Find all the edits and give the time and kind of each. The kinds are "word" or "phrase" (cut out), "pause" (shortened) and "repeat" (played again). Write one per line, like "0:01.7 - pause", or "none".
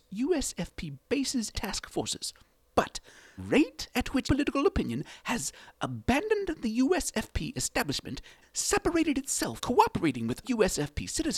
0:01.5 - word
0:03.4 - word
0:04.2 - word
0:08.4 - word
0:09.6 - word
0:10.4 - word